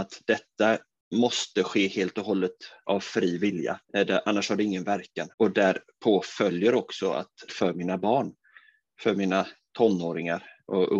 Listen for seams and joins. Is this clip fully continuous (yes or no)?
no